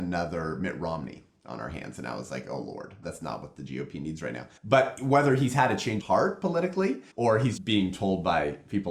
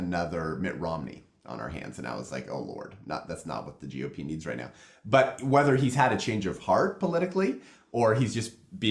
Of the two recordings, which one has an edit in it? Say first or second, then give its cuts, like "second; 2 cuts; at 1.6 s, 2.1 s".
first; 5 cuts; at 3.0 s, 4.6 s, 6.0 s, 7.1 s, 7.6 s